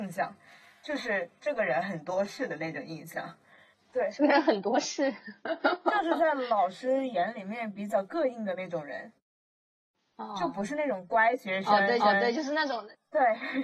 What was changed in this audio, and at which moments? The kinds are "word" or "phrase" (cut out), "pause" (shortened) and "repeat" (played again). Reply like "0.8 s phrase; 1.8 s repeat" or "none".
12.0 s repeat